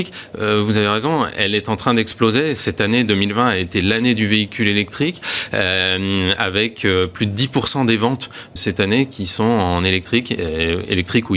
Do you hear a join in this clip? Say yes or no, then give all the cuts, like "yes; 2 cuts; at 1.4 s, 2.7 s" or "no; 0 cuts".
yes; 1 cut; at 8.6 s